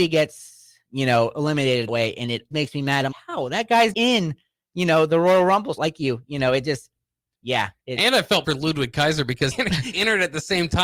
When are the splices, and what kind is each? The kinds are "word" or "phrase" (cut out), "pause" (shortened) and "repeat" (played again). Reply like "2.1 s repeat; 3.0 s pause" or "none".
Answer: 1.9 s word; 2.5 s word; 3.1 s word; 3.9 s word; 5.8 s word; 7.3 s word; 8.4 s word; 9.5 s word; 9.9 s word